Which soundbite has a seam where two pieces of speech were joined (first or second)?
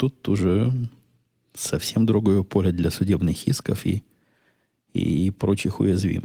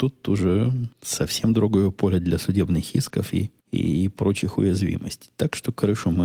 second